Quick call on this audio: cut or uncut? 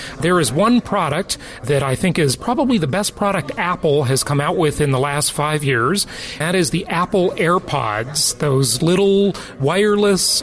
cut